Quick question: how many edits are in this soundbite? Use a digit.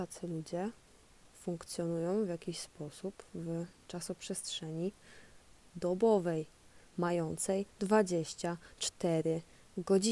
1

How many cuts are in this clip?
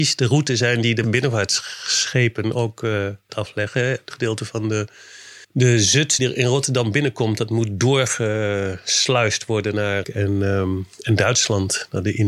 6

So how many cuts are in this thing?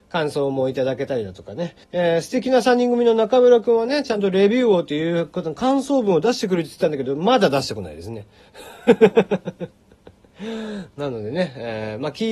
1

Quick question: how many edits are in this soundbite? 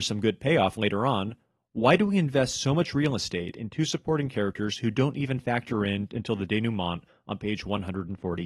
0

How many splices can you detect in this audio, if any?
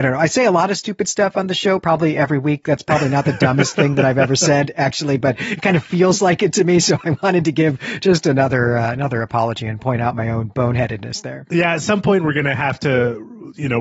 0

